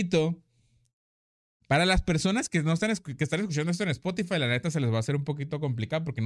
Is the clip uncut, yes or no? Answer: yes